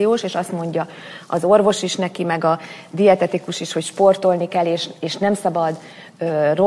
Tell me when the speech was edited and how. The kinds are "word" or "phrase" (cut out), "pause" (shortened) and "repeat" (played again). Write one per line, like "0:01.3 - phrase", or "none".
none